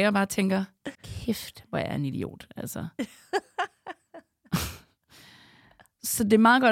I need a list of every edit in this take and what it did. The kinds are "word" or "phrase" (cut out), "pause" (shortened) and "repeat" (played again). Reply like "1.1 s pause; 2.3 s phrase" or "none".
0.9 s pause